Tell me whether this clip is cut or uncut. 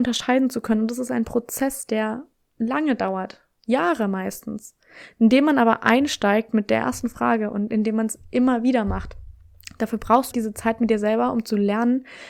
cut